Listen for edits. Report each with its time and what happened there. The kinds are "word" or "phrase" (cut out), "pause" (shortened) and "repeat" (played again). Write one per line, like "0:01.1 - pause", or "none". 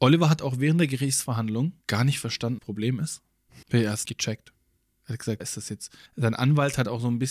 0:01.8 - pause
0:02.6 - phrase
0:03.6 - pause
0:04.0 - word
0:05.4 - word
0:06.1 - pause